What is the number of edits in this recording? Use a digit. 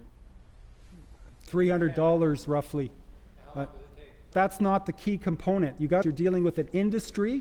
2